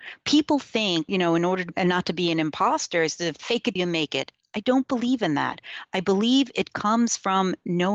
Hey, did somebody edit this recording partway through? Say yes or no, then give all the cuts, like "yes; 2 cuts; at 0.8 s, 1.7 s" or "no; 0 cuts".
yes; 3 cuts; at 1.1 s, 1.7 s, 3.8 s